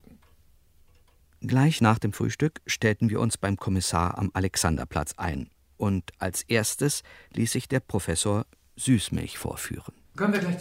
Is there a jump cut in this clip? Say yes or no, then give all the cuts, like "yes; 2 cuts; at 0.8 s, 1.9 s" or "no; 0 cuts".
no; 0 cuts